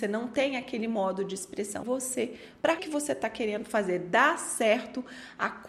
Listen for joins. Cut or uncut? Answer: cut